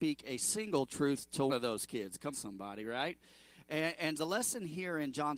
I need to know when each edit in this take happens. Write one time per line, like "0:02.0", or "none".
0:01.5
0:02.3
0:04.2